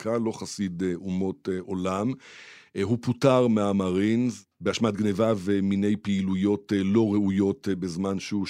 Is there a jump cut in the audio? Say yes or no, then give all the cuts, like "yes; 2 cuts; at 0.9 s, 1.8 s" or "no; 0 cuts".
no; 0 cuts